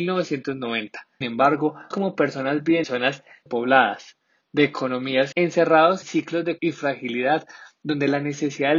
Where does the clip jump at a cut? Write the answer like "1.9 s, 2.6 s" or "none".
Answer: 1.2 s, 1.9 s, 2.8 s, 3.5 s, 5.3 s, 6.0 s, 6.6 s